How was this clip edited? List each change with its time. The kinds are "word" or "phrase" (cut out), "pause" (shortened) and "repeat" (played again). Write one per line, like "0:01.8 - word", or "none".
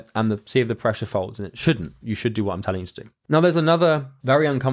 0:02.0 - word